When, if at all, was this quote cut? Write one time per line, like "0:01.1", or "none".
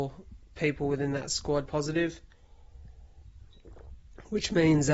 0:01.7